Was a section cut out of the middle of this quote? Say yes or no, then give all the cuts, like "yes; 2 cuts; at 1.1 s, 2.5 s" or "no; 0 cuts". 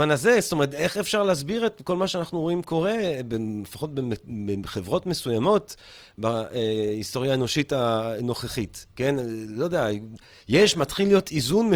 no; 0 cuts